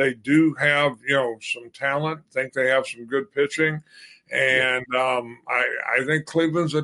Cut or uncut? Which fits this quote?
uncut